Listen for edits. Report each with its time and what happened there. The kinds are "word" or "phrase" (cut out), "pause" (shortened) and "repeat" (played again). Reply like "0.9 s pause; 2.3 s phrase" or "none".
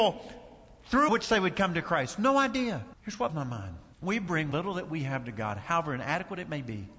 1.1 s phrase; 2.9 s pause; 3.3 s word; 3.9 s pause; 4.5 s word